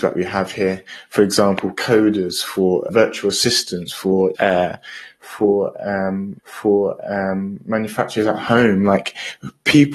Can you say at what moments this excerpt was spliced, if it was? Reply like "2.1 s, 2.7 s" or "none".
2.9 s, 4.3 s, 6.4 s